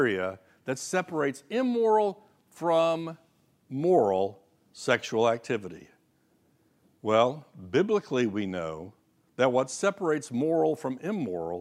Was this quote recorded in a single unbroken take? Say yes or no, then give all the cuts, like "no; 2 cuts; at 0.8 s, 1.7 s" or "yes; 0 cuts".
yes; 0 cuts